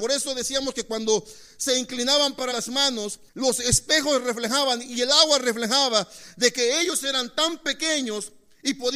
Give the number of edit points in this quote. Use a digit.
2